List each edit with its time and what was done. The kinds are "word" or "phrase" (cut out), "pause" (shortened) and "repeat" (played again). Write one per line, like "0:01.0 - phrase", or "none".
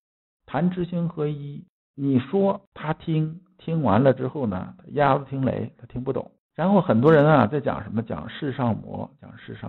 0:01.8 - pause
0:02.7 - pause
0:06.4 - pause